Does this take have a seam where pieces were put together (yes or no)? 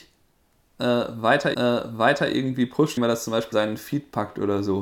yes